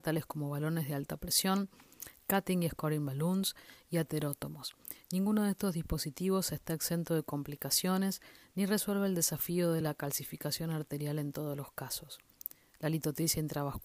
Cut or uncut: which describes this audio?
uncut